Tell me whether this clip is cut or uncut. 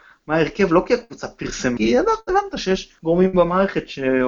cut